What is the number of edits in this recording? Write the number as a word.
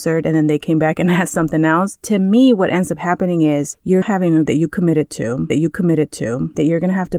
three